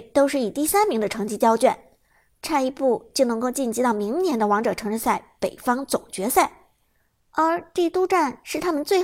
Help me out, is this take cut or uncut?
uncut